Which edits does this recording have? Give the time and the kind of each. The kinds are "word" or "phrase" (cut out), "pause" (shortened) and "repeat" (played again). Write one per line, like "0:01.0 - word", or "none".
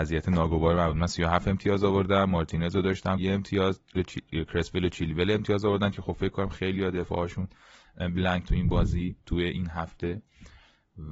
0:03.2 - word
0:04.0 - word
0:08.4 - word